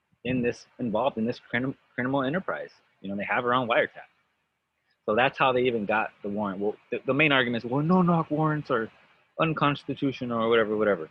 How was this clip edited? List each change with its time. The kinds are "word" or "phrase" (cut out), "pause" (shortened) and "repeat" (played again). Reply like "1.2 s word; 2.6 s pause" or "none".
none